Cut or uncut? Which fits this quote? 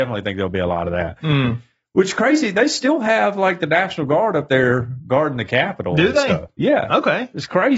uncut